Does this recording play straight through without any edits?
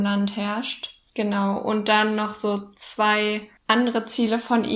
no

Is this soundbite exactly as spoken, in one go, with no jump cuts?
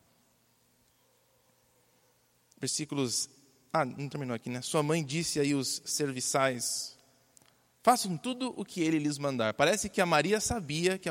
yes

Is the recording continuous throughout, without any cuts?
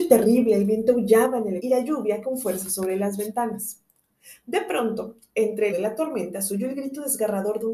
no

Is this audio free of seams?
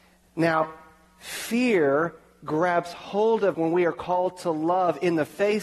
no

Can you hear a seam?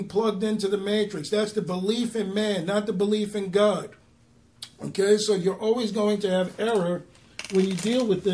no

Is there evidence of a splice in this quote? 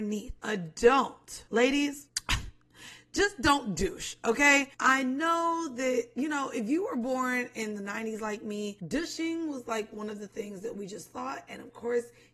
yes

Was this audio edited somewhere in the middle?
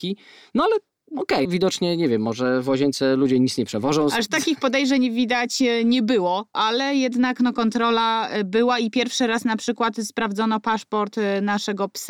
yes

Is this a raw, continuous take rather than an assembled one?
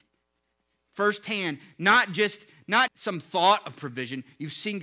no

